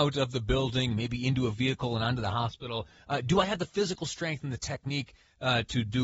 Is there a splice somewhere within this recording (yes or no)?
no